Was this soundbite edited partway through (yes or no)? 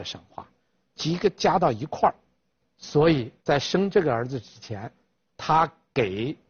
yes